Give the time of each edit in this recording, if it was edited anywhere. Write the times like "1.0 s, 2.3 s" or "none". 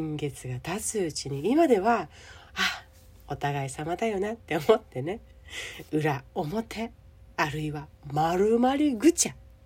none